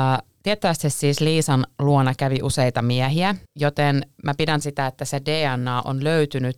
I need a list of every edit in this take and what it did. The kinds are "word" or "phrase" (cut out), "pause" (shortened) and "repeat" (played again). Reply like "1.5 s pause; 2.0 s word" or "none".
3.5 s pause; 4.6 s word